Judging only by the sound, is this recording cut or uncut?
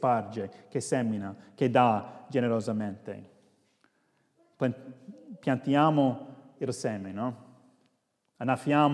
uncut